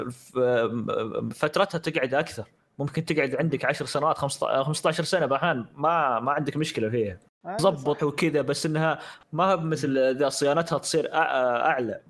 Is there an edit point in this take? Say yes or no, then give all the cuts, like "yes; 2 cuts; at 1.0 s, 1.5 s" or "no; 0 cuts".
yes; 1 cut; at 8.0 s